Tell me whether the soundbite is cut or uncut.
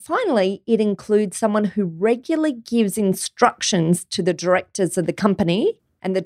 uncut